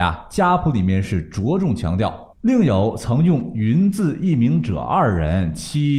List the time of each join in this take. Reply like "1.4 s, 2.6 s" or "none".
2.3 s